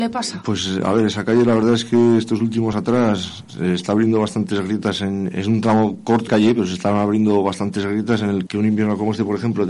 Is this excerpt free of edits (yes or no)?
no